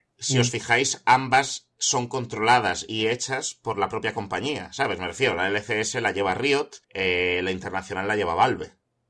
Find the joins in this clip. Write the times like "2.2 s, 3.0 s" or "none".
1.7 s, 6.8 s